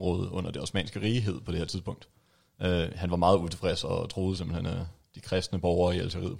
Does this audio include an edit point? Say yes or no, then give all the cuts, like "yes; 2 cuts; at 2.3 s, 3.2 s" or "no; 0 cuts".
no; 0 cuts